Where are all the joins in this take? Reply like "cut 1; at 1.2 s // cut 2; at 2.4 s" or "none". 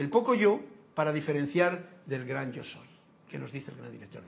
none